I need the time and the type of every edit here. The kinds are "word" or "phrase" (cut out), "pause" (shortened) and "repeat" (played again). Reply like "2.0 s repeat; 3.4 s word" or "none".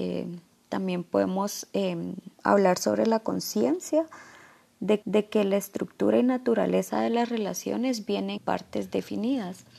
2.3 s pause; 5.0 s repeat; 8.4 s word